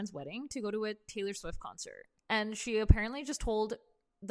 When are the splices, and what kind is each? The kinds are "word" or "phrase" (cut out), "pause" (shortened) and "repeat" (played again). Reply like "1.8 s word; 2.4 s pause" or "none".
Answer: 2.2 s pause